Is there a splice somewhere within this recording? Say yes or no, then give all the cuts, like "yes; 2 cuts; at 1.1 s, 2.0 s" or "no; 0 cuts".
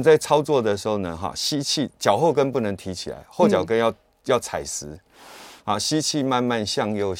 no; 0 cuts